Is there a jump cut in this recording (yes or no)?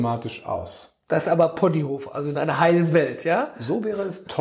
no